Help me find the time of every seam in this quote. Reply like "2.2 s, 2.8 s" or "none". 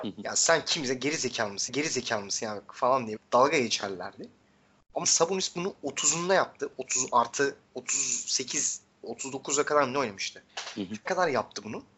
1.7 s, 3.2 s, 5.0 s, 7.6 s, 10.5 s, 11.1 s